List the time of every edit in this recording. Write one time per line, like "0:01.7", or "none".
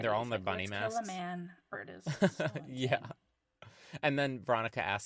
0:01.7